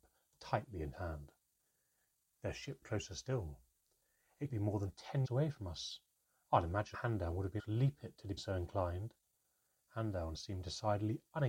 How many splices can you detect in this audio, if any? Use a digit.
8